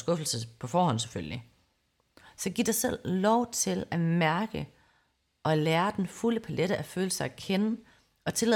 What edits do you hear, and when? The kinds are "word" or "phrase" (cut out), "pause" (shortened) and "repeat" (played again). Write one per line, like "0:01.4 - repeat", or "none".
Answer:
none